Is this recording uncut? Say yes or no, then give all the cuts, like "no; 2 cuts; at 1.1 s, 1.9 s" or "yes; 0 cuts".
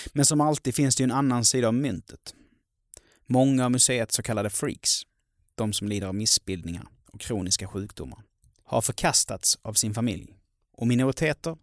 yes; 0 cuts